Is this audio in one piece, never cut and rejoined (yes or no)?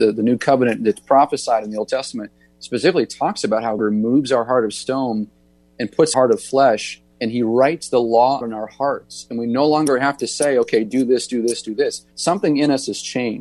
no